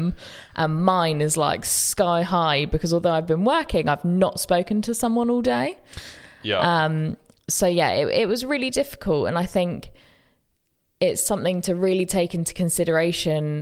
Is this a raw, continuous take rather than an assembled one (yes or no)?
yes